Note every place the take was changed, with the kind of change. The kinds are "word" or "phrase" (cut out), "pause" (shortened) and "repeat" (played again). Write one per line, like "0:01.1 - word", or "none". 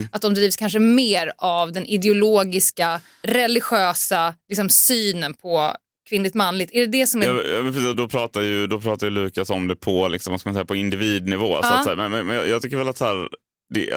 0:03.2 - word
0:07.9 - word